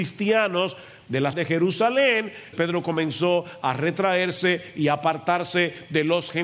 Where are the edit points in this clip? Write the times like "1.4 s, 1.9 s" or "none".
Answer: 1.3 s, 2.5 s